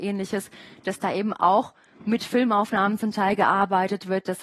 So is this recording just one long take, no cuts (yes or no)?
yes